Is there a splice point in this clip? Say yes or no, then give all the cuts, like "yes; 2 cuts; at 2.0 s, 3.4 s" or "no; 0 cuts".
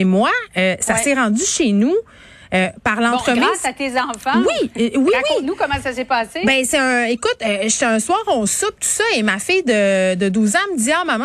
no; 0 cuts